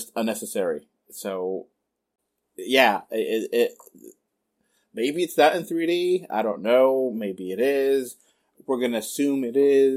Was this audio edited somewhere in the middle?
no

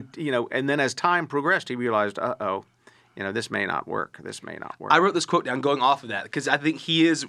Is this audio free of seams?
yes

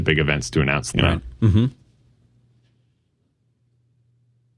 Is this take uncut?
no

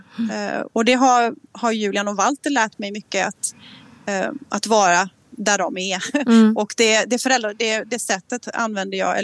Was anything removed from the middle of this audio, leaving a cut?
yes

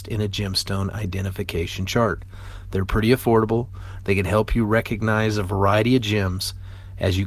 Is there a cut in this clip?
no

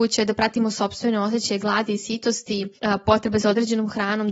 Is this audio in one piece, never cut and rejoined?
yes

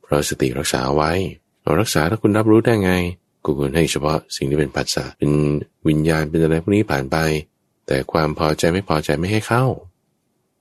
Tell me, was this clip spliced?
yes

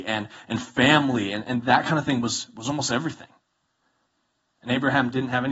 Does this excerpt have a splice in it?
no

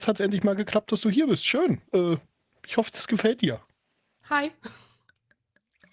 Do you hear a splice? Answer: no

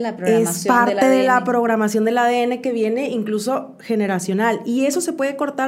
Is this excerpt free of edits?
yes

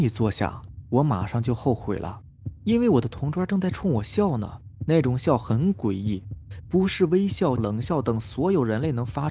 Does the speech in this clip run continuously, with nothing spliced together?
no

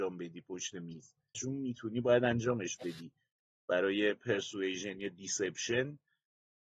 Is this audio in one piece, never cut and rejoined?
no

